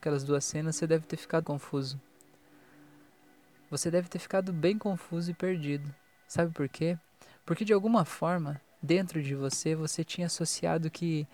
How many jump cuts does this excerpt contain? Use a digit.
1